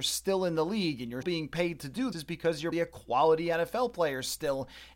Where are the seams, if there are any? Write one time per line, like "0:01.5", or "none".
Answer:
0:01.2
0:02.1
0:02.7